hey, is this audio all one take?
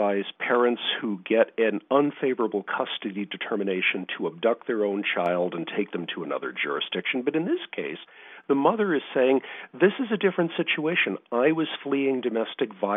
yes; 0 cuts

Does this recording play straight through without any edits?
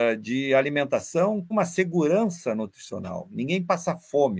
no; 1 cut; at 1.5 s

